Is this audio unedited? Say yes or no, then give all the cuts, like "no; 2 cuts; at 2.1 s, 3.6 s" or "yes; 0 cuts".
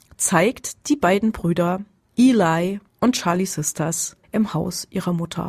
no; 2 cuts; at 2.9 s, 4.2 s